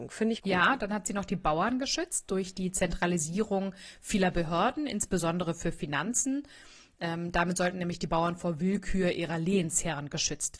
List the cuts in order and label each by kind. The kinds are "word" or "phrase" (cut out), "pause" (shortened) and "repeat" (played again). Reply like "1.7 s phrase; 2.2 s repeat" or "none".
none